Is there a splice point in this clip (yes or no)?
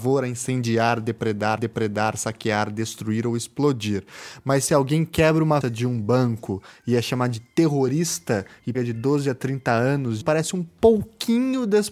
yes